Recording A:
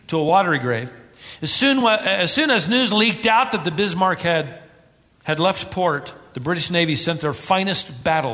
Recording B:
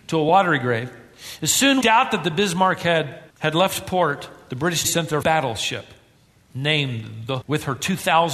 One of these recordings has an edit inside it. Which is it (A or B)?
B